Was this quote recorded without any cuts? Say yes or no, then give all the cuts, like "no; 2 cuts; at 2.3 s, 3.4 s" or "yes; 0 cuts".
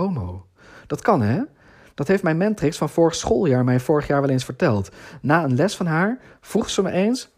yes; 0 cuts